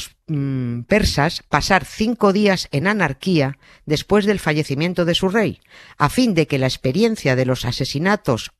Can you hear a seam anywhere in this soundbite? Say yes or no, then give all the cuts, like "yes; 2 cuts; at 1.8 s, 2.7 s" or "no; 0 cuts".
no; 0 cuts